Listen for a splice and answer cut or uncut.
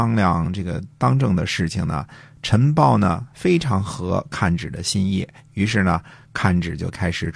uncut